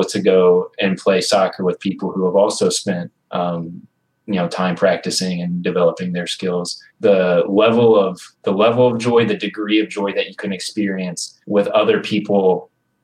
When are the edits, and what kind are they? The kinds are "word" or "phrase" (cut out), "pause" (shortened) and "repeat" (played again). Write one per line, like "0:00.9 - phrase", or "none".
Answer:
0:03.2 - pause
0:06.9 - pause
0:08.3 - pause
0:11.4 - pause